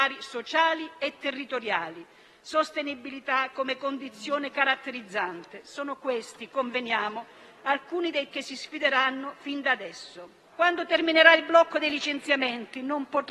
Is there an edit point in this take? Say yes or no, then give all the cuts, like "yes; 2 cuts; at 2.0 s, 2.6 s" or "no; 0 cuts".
yes; 2 cuts; at 8.3 s, 10.4 s